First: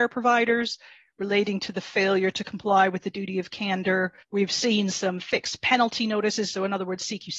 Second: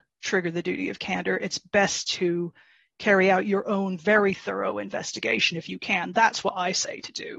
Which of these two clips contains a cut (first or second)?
first